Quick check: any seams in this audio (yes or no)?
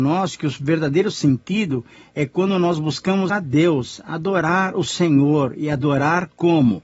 yes